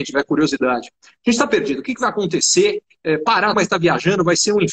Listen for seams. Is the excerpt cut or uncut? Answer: cut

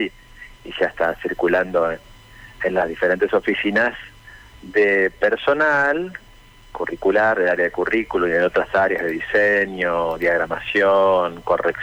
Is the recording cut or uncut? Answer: uncut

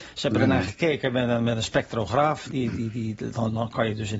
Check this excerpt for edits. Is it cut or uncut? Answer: uncut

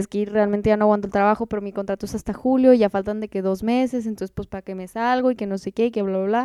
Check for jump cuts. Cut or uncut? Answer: uncut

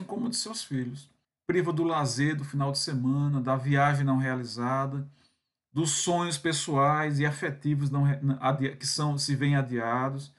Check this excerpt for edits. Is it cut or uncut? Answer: cut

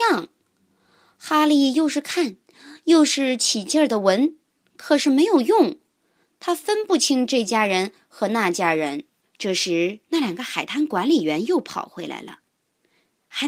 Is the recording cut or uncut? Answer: cut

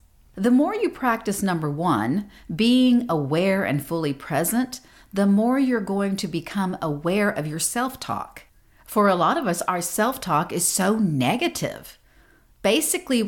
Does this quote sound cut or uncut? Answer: uncut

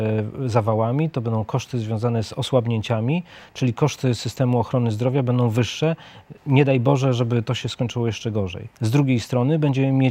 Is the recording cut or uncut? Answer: cut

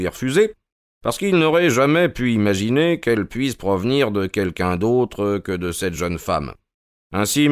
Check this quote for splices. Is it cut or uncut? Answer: uncut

